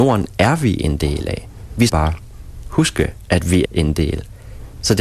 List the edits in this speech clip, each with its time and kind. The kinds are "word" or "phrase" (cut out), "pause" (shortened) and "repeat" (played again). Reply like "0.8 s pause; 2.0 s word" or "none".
1.9 s word; 3.6 s word